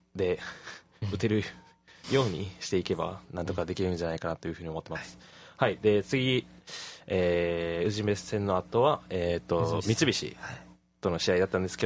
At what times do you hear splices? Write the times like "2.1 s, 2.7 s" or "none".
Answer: none